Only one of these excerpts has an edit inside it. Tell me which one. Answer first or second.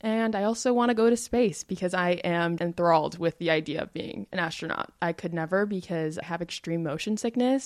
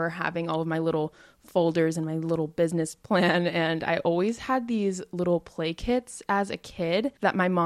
first